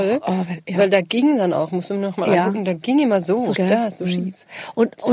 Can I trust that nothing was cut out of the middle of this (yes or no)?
no